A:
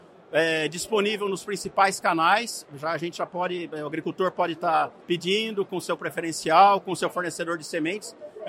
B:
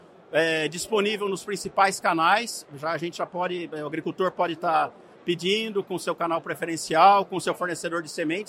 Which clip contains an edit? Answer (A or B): A